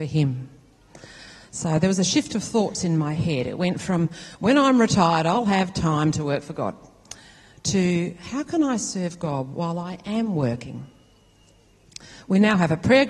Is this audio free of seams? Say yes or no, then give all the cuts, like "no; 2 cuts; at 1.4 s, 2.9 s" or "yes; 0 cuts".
yes; 0 cuts